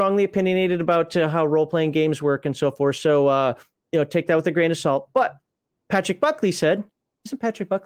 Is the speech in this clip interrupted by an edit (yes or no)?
no